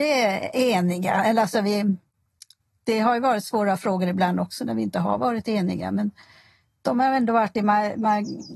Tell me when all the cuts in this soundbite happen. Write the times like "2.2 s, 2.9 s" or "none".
none